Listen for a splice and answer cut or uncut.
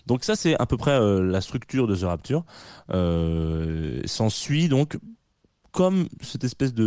uncut